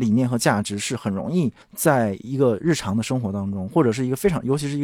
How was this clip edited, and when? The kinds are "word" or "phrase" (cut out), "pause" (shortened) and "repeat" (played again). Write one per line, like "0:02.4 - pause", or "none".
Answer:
0:01.6 - pause